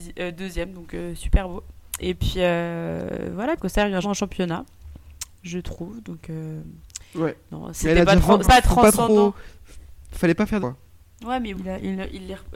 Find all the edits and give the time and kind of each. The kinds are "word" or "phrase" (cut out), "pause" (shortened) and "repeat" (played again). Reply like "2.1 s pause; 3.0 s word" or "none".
3.6 s word; 4.0 s word; 8.4 s word; 10.6 s word; 11.5 s word